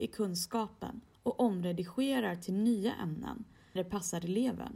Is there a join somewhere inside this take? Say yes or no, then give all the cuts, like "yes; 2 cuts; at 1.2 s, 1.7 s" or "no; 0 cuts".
yes; 1 cut; at 3.8 s